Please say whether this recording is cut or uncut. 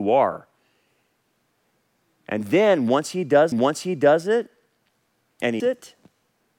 cut